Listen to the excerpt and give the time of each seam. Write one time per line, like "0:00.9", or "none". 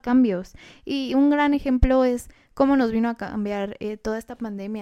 none